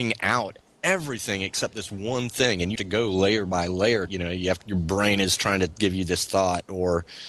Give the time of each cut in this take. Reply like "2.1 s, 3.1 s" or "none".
2.8 s, 4.1 s, 4.6 s